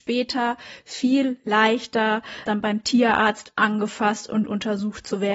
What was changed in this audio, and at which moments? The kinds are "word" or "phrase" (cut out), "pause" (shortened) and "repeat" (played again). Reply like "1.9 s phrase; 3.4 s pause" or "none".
2.5 s word